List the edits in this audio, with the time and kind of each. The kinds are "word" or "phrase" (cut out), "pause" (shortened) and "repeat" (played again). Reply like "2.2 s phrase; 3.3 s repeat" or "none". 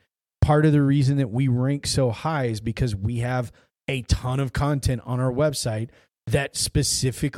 none